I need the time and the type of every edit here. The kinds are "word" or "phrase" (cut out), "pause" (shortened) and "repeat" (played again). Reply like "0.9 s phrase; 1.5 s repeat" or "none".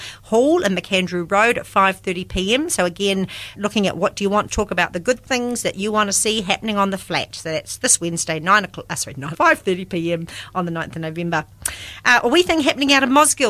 3.6 s word; 4.5 s phrase; 9.3 s word